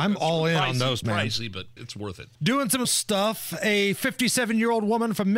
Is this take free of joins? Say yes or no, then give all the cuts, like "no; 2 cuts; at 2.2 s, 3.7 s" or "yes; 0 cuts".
no; 4 cuts; at 1.0 s, 1.8 s, 2.3 s, 2.8 s